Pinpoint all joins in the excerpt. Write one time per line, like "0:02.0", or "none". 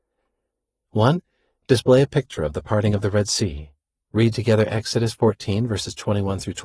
none